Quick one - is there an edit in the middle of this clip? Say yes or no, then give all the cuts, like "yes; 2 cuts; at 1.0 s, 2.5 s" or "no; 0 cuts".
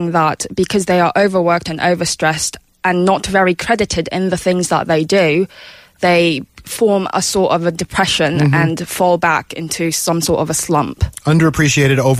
no; 0 cuts